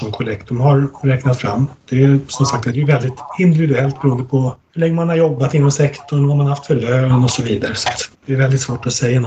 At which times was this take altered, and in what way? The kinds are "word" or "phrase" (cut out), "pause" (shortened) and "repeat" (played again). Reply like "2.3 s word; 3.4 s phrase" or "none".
8.1 s pause